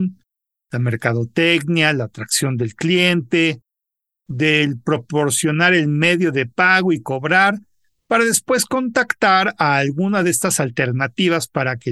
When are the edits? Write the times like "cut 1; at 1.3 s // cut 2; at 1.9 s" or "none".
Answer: none